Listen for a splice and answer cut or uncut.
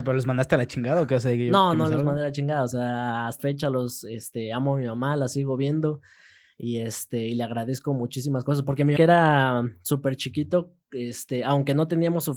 cut